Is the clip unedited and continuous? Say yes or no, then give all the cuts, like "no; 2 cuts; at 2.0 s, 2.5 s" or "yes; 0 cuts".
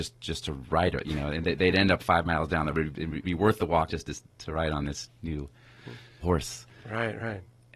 no; 5 cuts; at 2.0 s, 2.7 s, 3.2 s, 3.9 s, 6.2 s